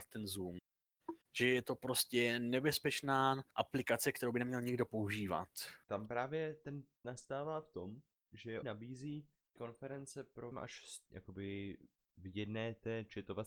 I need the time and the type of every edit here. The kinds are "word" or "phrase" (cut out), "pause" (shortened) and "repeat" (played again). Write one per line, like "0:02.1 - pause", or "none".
0:01.2 - pause
0:03.5 - pause
0:05.8 - pause
0:07.0 - word
0:08.6 - word
0:09.6 - word
0:10.5 - word
0:11.1 - word